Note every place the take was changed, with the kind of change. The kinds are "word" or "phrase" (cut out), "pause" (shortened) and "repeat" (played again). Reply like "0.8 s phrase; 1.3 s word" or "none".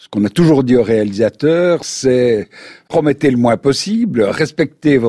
none